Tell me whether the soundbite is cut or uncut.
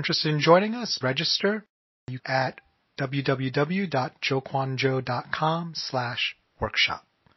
cut